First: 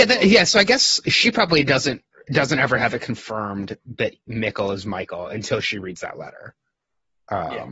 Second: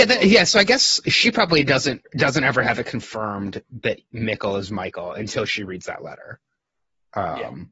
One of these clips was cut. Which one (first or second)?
second